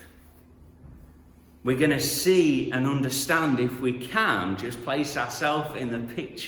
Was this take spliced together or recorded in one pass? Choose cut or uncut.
uncut